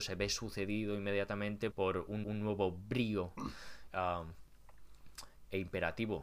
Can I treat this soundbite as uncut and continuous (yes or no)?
no